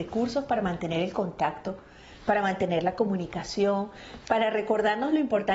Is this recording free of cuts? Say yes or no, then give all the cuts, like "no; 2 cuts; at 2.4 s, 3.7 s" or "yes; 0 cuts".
yes; 0 cuts